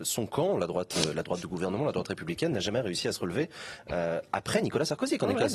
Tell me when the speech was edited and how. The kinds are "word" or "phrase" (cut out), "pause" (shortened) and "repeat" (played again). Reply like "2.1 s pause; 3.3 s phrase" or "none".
none